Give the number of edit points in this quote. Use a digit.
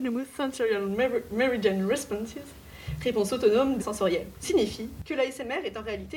2